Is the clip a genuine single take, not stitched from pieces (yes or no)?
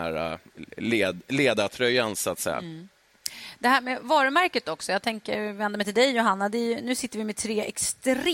yes